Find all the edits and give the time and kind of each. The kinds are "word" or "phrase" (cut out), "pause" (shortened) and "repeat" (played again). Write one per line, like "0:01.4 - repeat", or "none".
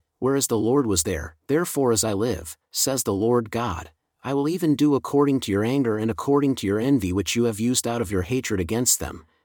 none